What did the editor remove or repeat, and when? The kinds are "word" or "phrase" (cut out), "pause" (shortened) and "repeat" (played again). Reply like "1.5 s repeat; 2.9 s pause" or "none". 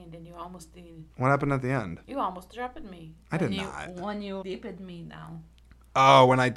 1.1 s pause; 2.0 s pause; 4.4 s word